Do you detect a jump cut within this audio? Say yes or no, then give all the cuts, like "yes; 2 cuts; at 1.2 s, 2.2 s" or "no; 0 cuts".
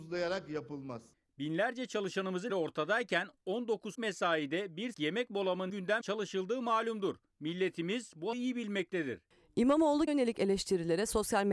yes; 7 cuts; at 2.5 s, 3.9 s, 4.9 s, 5.7 s, 6.0 s, 8.3 s, 10.1 s